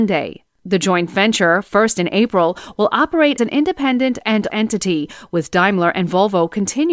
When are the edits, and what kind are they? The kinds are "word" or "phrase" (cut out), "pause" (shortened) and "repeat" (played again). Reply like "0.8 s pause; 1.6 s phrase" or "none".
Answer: 1.9 s word; 3.4 s word; 4.5 s word